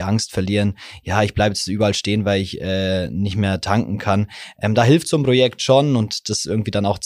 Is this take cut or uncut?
uncut